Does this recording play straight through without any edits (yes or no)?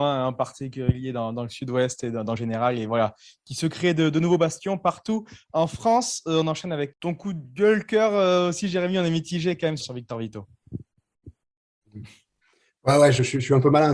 no